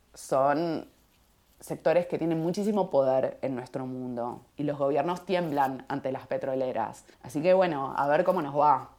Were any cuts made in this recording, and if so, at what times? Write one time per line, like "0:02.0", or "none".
0:04.5
0:07.1